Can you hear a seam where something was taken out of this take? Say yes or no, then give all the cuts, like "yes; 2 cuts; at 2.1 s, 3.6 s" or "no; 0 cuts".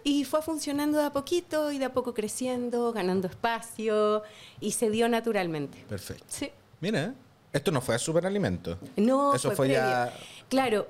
yes; 1 cut; at 4.6 s